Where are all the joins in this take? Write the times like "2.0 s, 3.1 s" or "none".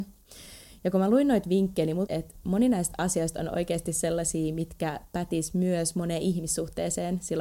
2.1 s